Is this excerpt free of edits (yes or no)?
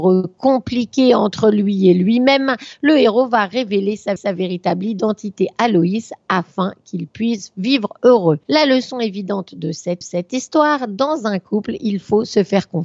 no